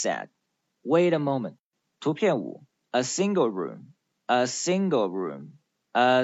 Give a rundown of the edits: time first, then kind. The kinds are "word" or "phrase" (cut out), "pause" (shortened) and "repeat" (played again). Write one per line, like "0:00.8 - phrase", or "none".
none